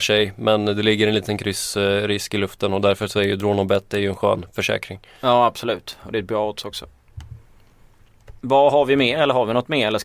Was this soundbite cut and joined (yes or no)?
yes